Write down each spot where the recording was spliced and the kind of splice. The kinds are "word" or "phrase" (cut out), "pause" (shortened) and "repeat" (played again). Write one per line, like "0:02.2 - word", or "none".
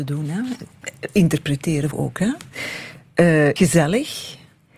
0:01.9 - phrase
0:03.6 - word